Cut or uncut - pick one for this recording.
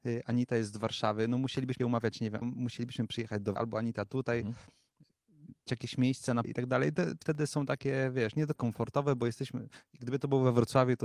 cut